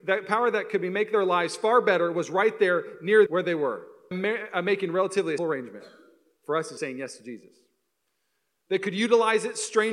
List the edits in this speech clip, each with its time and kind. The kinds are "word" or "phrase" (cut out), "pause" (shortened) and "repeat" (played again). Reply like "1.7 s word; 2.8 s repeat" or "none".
3.3 s word; 4.1 s word; 5.4 s word; 6.8 s word